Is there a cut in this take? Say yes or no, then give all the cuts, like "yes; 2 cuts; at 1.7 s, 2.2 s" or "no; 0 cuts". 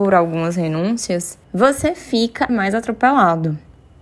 yes; 2 cuts; at 1.4 s, 2.5 s